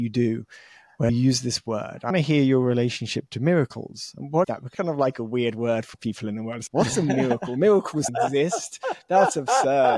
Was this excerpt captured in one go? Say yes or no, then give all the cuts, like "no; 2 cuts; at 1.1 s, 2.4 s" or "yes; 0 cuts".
no; 7 cuts; at 1.1 s, 2.1 s, 4.4 s, 4.7 s, 5.9 s, 6.7 s, 8.1 s